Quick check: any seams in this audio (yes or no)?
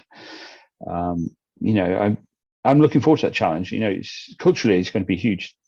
no